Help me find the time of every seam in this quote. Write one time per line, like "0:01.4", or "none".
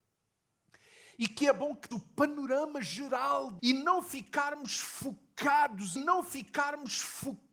0:01.9
0:03.6
0:06.0